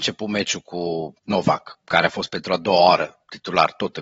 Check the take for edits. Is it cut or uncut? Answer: cut